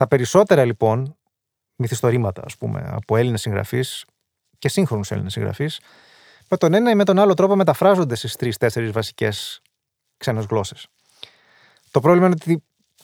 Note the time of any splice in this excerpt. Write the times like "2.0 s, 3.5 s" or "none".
none